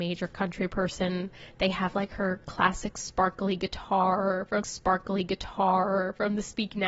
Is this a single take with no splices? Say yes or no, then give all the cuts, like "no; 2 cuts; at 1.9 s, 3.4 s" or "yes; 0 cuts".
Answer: no; 1 cut; at 4.6 s